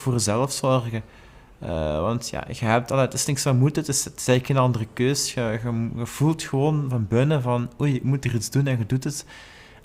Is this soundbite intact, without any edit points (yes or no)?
yes